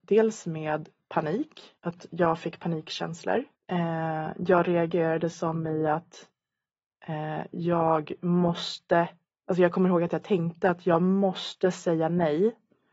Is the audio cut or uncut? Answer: cut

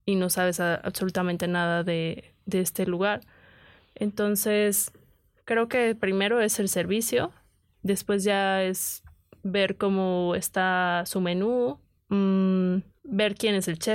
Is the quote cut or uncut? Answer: uncut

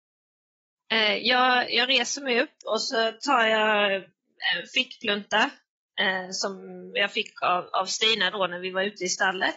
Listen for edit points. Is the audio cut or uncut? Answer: uncut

